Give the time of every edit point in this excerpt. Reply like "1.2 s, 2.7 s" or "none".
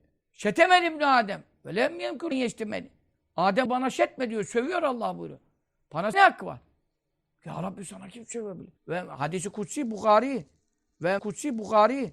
2.3 s, 3.7 s, 6.1 s, 7.1 s, 8.8 s, 11.2 s

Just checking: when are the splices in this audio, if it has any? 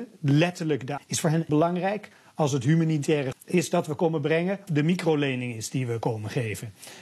1.0 s, 1.5 s, 3.3 s, 4.7 s

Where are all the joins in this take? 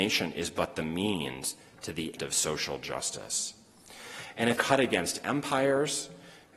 2.2 s, 4.6 s

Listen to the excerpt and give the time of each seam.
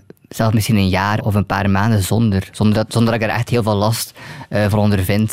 1.2 s

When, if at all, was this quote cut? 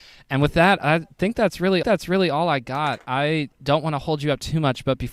1.8 s, 3.5 s

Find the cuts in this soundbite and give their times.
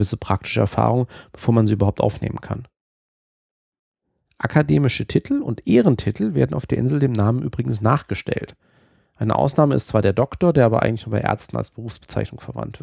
none

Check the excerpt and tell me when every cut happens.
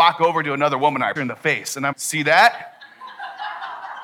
1.2 s, 1.9 s

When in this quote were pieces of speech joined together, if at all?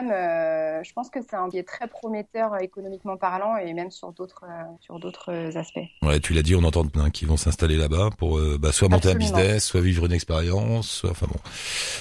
1.5 s, 4.8 s, 6.9 s

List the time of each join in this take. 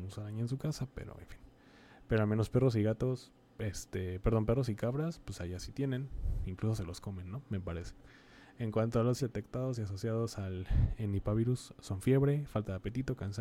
9.2 s

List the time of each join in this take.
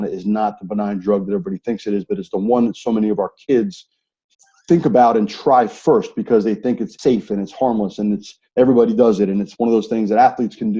4.3 s, 7.0 s

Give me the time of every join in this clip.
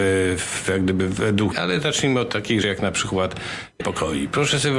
1.2 s, 1.5 s, 2.6 s, 3.8 s

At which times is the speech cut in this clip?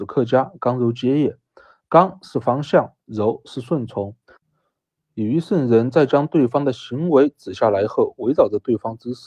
none

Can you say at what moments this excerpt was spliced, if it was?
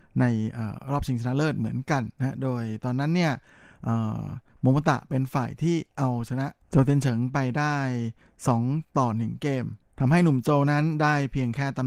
6.6 s

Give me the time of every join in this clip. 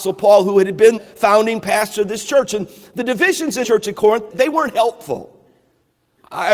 1.0 s, 3.6 s, 4.3 s

